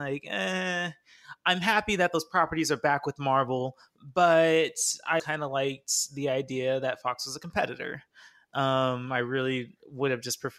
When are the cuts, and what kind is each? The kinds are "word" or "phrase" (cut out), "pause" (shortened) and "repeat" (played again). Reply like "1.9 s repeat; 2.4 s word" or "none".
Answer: 5.2 s word

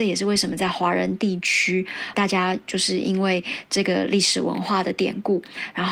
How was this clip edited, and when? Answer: 2.1 s word

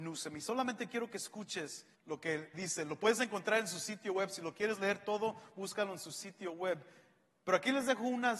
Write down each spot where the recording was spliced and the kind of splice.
1.9 s pause; 2.5 s phrase

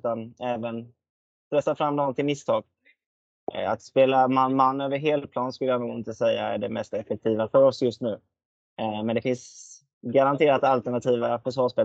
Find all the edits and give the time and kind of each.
none

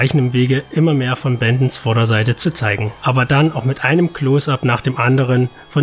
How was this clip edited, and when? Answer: none

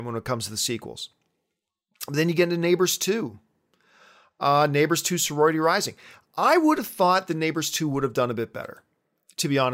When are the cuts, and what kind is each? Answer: none

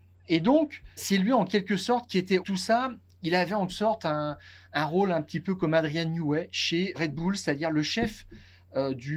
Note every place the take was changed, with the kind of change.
1.0 s word; 2.4 s word; 3.7 s word; 6.9 s word

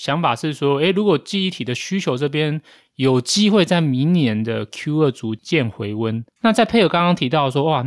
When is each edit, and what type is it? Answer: none

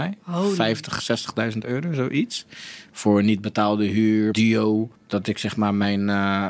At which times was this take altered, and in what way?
4.3 s phrase; 5.0 s pause

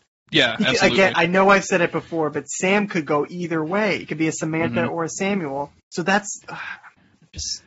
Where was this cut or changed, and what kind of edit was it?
5.8 s pause; 6.4 s pause

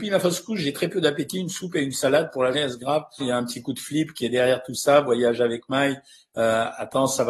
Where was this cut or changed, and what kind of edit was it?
2.5 s word; 3.2 s word

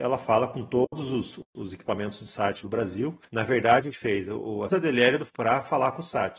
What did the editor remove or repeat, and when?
1.4 s pause; 2.6 s word; 3.3 s pause; 3.9 s phrase; 4.7 s phrase; 5.3 s word

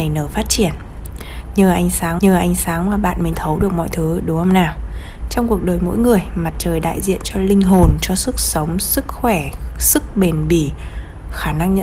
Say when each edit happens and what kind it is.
2.2 s repeat; 3.3 s word

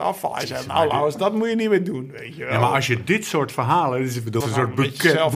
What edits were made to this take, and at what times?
4.4 s word

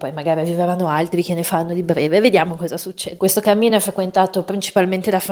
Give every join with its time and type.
none

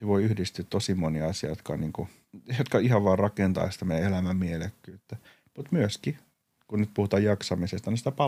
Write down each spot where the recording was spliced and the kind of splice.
none

